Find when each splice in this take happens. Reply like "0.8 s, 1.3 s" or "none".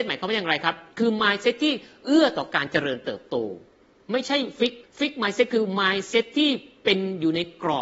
4.8 s